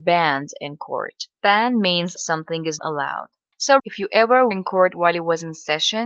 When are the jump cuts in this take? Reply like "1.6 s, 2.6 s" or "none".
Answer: 1.3 s, 2.2 s, 2.8 s, 3.8 s, 4.5 s